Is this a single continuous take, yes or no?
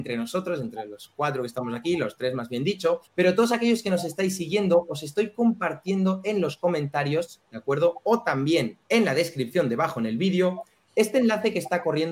no